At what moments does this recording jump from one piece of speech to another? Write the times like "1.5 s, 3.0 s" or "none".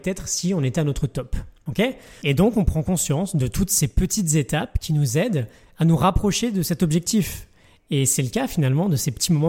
none